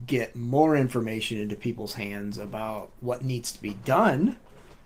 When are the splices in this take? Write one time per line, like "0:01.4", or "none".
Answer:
none